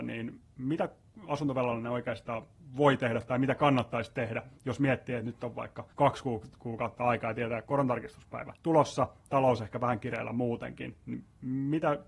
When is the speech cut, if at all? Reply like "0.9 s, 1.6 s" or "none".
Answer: 5.9 s, 8.6 s